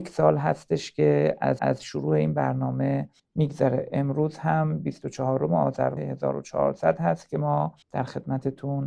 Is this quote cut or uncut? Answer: cut